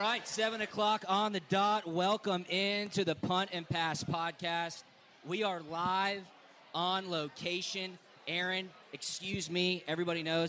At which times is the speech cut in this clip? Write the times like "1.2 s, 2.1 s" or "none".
none